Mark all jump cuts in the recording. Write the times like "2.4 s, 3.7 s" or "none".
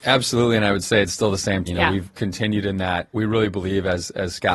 1.7 s, 2.1 s, 3.1 s